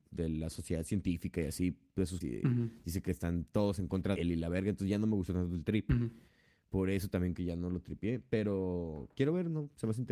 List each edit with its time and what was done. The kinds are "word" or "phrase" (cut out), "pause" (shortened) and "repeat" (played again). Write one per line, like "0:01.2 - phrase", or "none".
0:02.2 - word
0:04.2 - word
0:07.3 - word